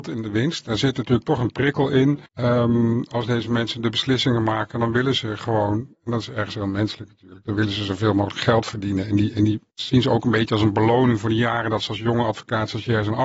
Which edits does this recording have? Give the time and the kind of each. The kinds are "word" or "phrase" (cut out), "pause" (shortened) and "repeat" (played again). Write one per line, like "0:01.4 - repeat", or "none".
0:02.3 - pause
0:05.9 - pause
0:09.7 - pause